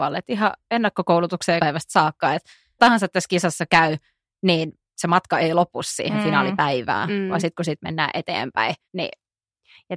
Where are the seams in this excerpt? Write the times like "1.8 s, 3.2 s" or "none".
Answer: 1.6 s, 2.8 s, 8.8 s